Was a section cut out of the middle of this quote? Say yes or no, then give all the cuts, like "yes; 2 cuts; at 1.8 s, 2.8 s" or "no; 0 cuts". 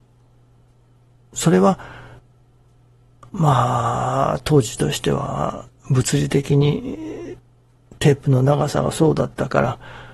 no; 0 cuts